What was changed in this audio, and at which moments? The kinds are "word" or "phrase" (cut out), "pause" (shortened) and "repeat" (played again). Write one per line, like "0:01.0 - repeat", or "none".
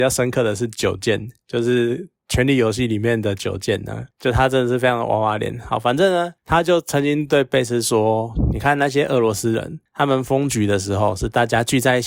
none